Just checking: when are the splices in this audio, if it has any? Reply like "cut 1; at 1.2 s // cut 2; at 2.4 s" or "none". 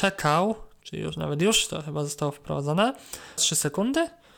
cut 1; at 3.4 s